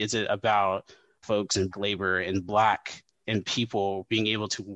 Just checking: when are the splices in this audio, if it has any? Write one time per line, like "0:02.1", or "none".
0:01.2
0:01.7
0:03.2